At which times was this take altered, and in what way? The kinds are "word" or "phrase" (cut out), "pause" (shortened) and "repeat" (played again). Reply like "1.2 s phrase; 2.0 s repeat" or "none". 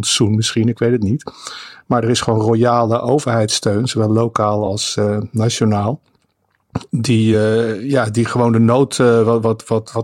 none